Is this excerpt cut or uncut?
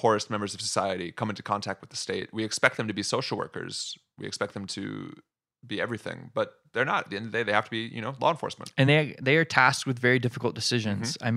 uncut